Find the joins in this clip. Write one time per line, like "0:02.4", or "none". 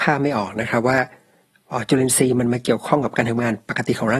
none